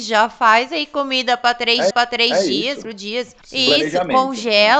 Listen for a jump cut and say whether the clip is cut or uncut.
cut